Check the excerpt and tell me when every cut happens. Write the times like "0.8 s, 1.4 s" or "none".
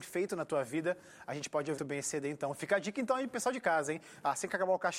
1.8 s